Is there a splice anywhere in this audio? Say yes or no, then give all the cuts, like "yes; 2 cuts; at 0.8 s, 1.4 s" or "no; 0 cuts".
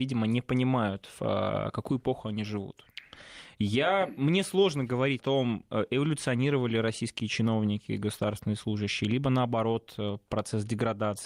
yes; 1 cut; at 5.2 s